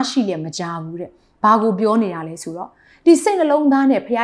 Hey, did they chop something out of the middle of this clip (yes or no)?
no